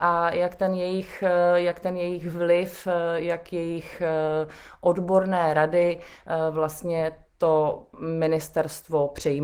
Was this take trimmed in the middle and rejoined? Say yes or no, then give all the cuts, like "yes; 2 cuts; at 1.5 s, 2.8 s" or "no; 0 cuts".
no; 0 cuts